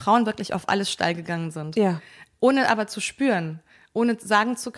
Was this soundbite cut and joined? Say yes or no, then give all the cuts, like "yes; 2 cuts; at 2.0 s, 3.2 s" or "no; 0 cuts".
no; 0 cuts